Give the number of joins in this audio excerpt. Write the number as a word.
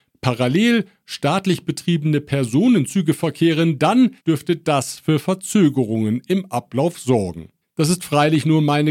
two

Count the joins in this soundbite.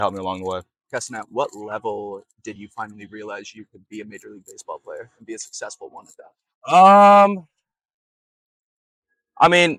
zero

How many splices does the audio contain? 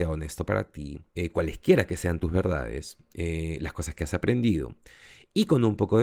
one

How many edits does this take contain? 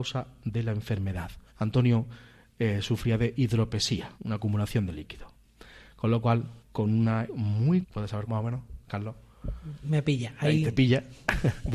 six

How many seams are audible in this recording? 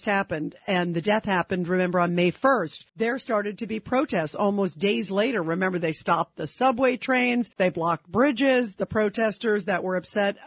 two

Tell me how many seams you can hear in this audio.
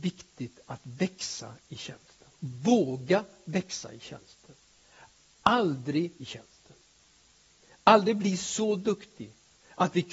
two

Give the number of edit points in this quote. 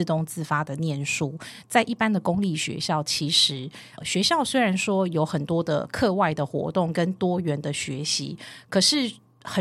one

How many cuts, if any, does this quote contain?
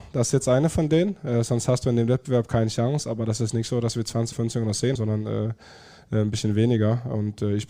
two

